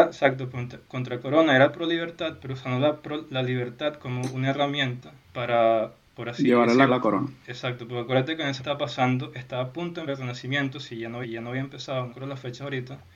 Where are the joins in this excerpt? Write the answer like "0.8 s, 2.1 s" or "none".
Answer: 5.2 s, 6.9 s, 8.6 s, 10.1 s, 11.2 s, 12.1 s